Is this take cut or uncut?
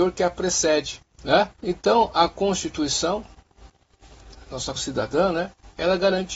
cut